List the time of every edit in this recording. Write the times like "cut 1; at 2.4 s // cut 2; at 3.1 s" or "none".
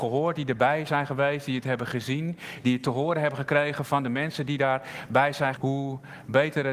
cut 1; at 5.6 s